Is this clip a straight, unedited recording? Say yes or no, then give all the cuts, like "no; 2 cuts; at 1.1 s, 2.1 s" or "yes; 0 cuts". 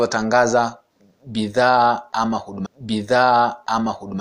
no; 1 cut; at 2.7 s